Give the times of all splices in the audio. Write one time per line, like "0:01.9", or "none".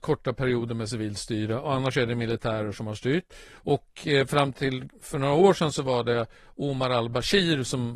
0:03.5